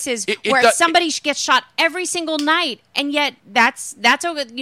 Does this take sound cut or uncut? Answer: cut